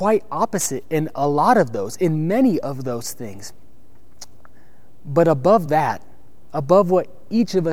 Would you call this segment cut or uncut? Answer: uncut